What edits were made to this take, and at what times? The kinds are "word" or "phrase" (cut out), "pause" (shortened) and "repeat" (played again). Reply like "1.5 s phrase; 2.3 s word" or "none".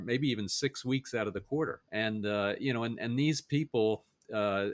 1.9 s pause